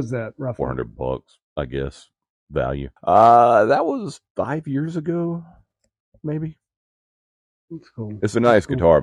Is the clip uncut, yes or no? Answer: no